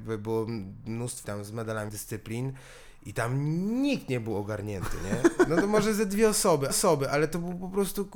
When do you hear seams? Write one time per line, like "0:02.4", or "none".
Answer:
0:01.2
0:01.9
0:06.7